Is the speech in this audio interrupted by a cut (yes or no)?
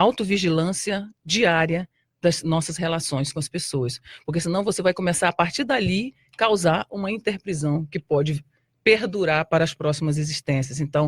no